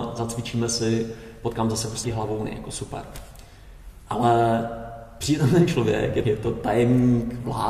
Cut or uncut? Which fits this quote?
cut